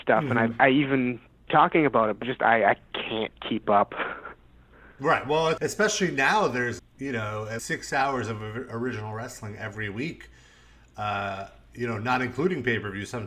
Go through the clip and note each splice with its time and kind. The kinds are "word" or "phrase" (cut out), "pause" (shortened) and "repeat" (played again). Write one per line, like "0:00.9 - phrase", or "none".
0:01.5 - word
0:02.2 - word
0:05.6 - word
0:06.8 - word
0:07.6 - word